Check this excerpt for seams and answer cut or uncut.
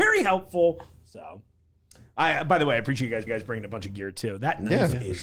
cut